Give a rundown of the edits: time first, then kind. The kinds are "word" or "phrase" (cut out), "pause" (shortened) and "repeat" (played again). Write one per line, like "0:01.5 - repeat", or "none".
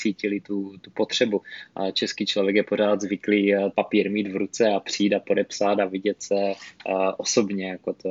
0:03.7 - word